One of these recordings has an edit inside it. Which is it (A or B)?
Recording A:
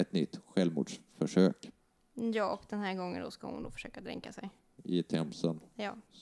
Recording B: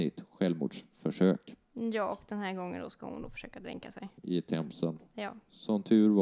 B